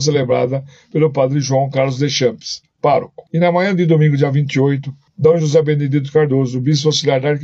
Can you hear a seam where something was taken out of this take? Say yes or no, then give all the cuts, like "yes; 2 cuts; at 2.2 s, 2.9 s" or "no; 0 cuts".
yes; 1 cut; at 3.3 s